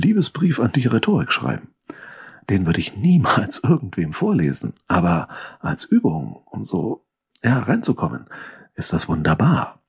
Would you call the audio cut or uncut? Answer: uncut